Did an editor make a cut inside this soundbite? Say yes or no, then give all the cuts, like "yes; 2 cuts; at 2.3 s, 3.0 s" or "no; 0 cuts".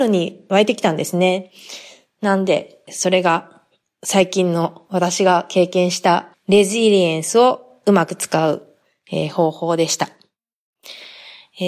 no; 0 cuts